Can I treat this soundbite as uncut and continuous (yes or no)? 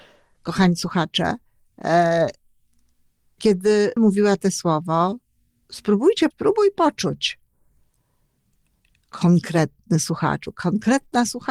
no